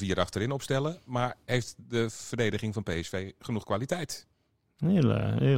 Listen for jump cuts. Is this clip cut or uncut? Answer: uncut